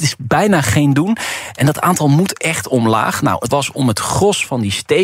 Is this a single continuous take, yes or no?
no